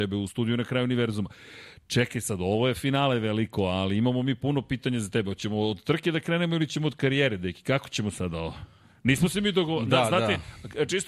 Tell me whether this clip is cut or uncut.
uncut